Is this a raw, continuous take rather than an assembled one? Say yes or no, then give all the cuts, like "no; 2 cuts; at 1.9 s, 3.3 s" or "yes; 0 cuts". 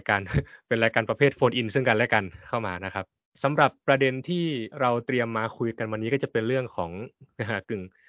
no; 2 cuts; at 3.2 s, 4.7 s